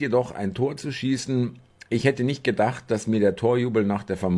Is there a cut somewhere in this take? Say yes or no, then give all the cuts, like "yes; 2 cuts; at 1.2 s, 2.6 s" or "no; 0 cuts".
no; 0 cuts